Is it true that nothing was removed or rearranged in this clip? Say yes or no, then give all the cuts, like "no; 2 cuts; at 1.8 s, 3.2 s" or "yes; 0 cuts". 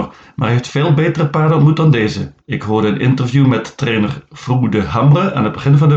no; 1 cut; at 2.4 s